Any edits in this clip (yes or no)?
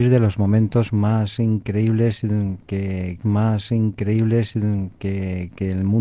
yes